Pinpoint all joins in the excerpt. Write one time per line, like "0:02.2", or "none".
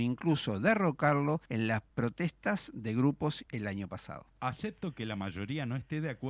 0:01.4
0:01.9
0:03.5
0:04.3